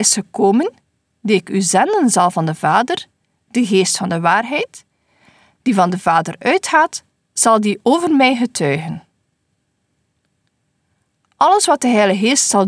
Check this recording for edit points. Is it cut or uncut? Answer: uncut